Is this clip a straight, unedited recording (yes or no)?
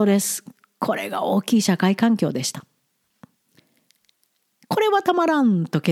yes